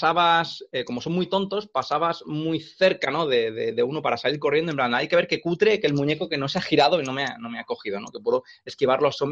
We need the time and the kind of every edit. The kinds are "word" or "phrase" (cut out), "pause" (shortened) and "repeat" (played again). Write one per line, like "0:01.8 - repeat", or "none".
none